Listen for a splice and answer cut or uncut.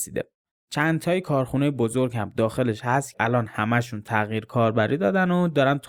cut